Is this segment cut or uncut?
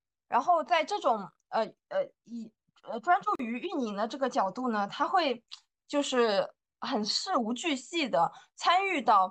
uncut